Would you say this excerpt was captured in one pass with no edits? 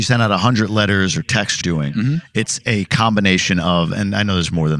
no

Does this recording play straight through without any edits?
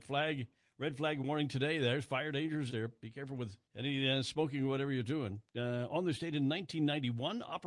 no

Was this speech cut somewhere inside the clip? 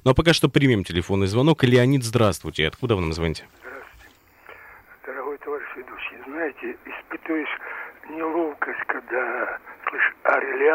no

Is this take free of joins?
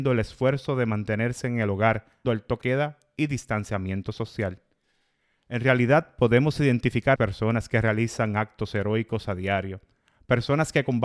no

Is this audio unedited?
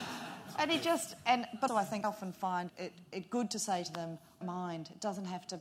no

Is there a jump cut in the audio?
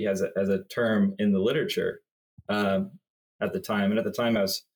no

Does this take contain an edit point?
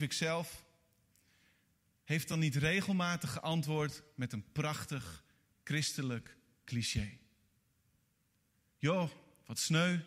no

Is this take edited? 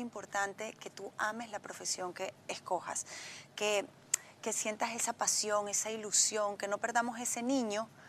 no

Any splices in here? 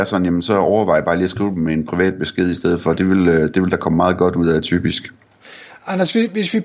no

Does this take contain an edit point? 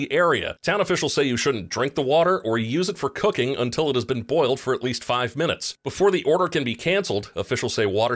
no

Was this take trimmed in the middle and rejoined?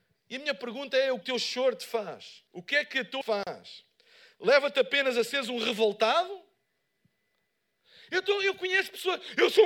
yes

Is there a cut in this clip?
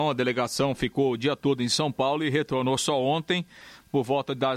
no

